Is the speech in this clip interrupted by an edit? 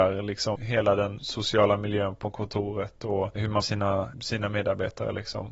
yes; 1 cut; at 3.6 s

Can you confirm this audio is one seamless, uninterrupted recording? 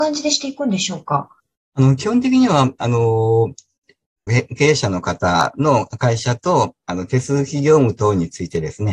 no; 2 cuts; at 1.4 s, 4.3 s

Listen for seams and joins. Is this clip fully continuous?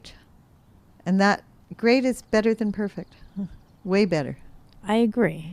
yes; 0 cuts

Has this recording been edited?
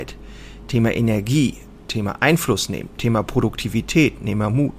no; 0 cuts

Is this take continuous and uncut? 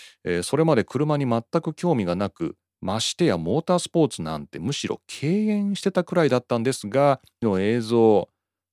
no; 1 cut; at 7.4 s

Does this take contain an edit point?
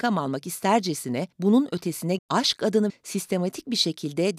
yes; 3 cuts; at 1.3 s, 2.2 s, 2.9 s

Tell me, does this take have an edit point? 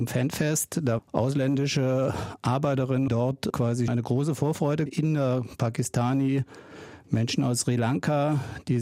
yes; 4 cuts; at 1.0 s, 3.1 s, 3.9 s, 4.9 s

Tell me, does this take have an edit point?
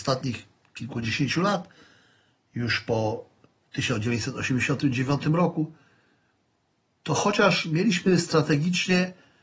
no; 0 cuts

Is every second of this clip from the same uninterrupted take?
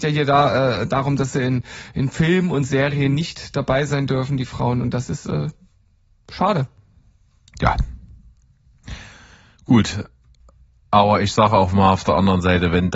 yes; 0 cuts

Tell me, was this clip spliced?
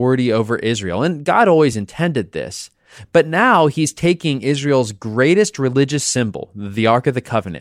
no; 0 cuts

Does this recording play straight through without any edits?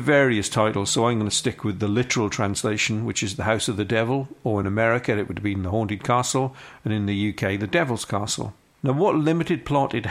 yes; 0 cuts

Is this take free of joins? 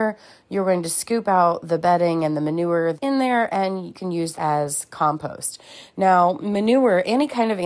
no; 3 cuts; at 3.0 s, 3.9 s, 4.3 s

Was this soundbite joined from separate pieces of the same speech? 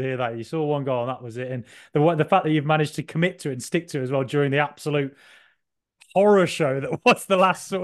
no; 0 cuts

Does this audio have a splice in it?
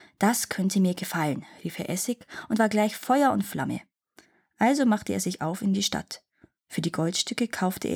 no; 0 cuts

